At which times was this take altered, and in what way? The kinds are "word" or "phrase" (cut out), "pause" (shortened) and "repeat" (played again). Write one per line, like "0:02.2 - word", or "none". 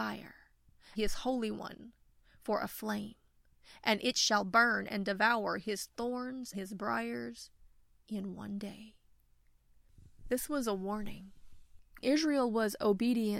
0:00.9 - word
0:06.5 - word
0:12.0 - word